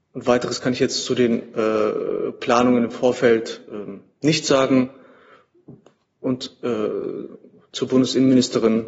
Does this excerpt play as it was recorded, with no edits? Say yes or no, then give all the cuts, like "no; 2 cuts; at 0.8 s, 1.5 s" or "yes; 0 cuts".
yes; 0 cuts